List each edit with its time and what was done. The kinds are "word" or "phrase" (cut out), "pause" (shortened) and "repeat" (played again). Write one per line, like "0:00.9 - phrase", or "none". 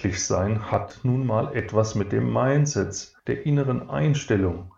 0:03.2 - pause